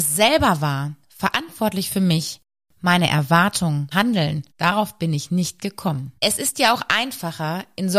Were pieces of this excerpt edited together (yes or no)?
yes